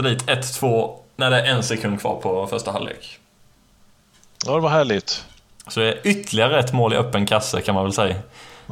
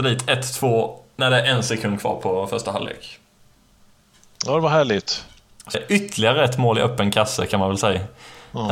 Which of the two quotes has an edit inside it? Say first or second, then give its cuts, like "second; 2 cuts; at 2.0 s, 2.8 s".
second; 1 cut; at 5.7 s